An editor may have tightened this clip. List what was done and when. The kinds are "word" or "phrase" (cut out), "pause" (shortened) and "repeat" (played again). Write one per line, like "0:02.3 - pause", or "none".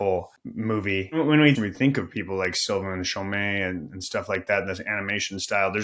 0:01.5 - phrase